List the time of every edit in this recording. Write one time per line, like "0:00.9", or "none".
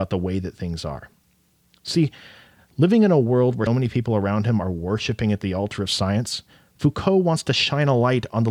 0:03.7